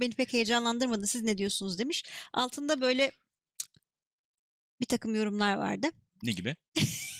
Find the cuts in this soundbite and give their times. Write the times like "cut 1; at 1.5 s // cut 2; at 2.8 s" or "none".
none